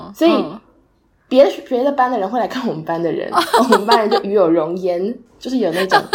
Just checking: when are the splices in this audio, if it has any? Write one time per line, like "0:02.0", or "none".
none